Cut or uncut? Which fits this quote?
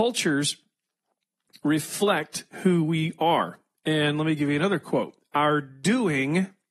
uncut